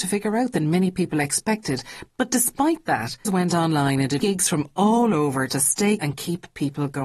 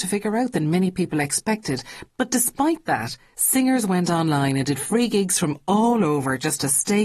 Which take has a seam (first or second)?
first